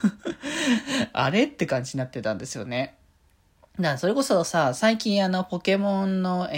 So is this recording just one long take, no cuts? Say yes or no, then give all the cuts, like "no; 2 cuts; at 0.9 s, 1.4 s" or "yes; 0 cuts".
yes; 0 cuts